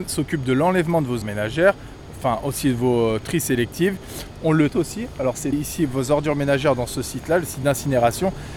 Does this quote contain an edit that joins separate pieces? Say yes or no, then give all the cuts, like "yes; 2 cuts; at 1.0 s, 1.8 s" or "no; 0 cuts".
yes; 3 cuts; at 1.2 s, 4.7 s, 5.5 s